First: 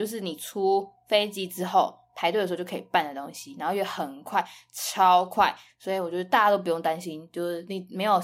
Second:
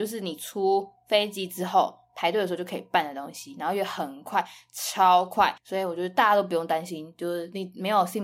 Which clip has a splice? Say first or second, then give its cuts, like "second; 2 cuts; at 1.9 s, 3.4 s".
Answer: second; 1 cut; at 5.6 s